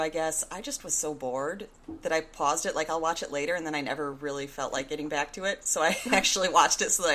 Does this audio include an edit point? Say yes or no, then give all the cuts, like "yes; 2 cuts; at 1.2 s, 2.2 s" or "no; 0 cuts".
no; 0 cuts